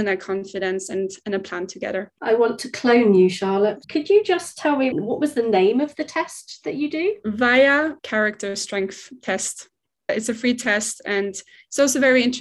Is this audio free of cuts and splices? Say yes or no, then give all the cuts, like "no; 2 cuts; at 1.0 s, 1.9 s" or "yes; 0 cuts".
yes; 0 cuts